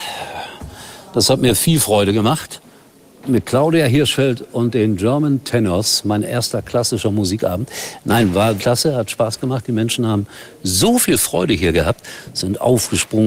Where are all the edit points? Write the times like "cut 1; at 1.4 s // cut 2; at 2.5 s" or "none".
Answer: cut 1; at 8.6 s